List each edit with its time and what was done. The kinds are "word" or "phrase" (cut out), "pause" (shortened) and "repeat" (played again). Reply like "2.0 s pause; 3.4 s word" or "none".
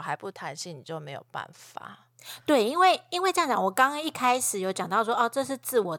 none